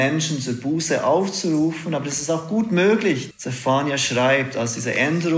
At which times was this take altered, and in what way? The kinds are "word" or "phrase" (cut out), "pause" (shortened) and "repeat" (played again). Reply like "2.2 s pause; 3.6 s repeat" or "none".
3.3 s word